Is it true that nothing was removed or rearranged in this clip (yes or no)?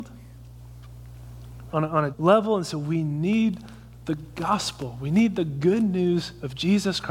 no